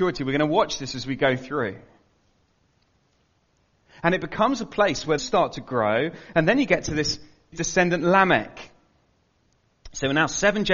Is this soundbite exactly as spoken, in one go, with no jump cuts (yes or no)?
no